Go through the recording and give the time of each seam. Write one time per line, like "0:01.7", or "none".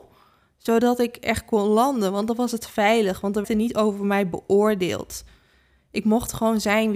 0:03.4